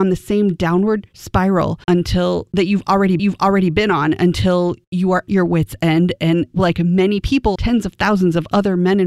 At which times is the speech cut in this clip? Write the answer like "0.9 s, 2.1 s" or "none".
1.8 s, 3.2 s, 5.3 s, 7.6 s